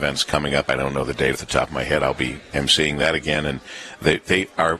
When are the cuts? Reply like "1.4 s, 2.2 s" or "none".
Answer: 1.3 s